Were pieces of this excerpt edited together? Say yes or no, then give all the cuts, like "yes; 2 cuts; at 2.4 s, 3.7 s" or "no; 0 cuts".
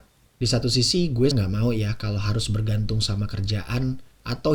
yes; 1 cut; at 1.3 s